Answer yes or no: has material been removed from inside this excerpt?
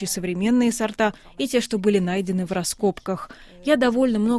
no